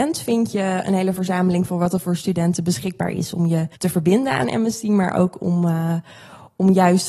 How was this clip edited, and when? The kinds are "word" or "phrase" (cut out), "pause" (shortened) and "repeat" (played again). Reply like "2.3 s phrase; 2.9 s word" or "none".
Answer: 3.8 s pause

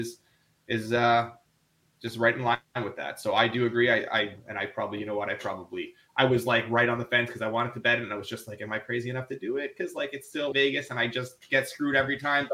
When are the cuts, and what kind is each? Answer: 10.5 s word

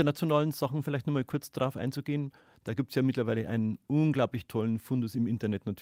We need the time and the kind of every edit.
none

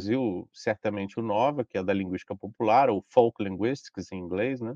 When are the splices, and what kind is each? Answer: 1.1 s word

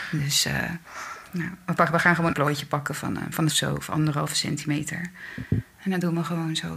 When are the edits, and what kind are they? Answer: 1.3 s pause; 2.3 s phrase; 3.5 s phrase

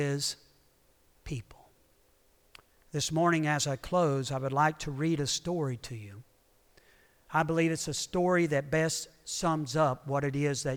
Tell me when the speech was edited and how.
2.5 s pause

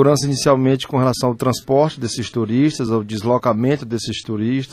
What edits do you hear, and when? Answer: none

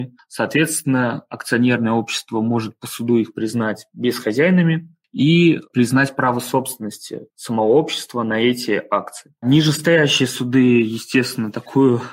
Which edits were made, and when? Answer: 7.3 s pause

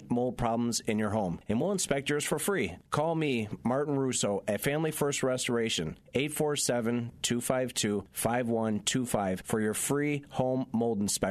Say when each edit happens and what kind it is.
none

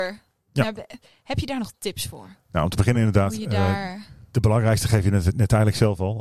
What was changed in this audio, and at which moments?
none

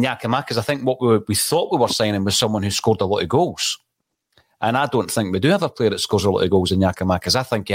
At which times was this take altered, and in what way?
none

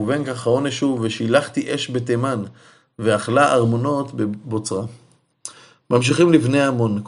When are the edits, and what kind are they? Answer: none

